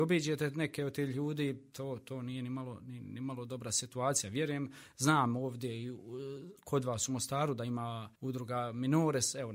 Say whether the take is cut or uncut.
cut